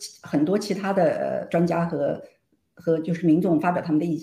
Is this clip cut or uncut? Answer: uncut